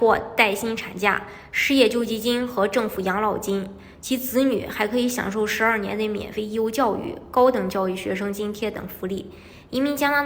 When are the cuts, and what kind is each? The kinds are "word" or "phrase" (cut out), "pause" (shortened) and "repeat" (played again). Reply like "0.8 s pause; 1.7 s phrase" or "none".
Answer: none